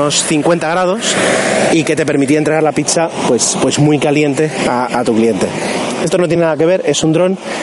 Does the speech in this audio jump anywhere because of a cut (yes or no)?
no